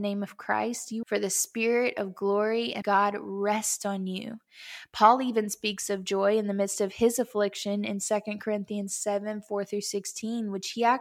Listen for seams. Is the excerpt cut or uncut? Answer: cut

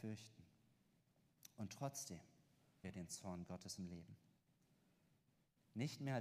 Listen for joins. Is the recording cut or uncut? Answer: cut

